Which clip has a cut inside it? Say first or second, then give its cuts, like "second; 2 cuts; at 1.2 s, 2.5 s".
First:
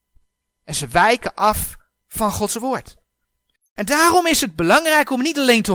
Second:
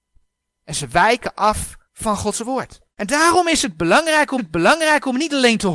second; 3 cuts; at 1.8 s, 2.9 s, 4.4 s